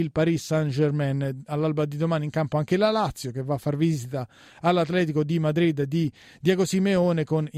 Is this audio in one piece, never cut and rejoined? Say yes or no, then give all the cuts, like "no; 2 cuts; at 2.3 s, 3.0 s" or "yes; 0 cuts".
yes; 0 cuts